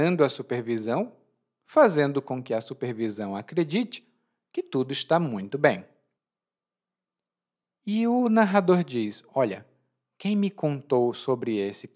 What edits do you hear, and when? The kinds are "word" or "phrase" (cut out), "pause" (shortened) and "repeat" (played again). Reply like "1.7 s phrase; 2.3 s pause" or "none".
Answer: none